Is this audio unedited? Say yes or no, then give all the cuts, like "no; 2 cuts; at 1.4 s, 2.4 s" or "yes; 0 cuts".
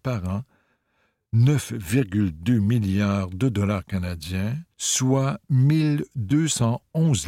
no; 1 cut; at 4.7 s